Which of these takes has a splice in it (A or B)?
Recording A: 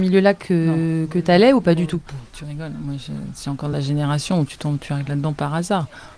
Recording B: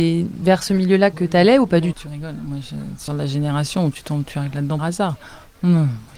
B